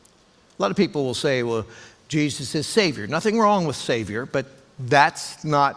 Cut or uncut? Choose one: uncut